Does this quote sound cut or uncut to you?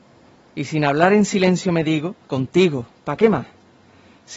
cut